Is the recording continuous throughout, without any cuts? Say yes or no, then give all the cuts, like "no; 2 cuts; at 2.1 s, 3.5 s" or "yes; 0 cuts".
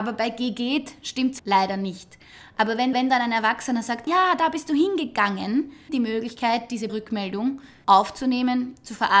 no; 5 cuts; at 1.4 s, 2.9 s, 4.1 s, 5.9 s, 6.9 s